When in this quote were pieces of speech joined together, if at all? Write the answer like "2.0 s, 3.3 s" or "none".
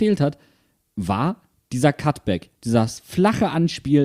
2.6 s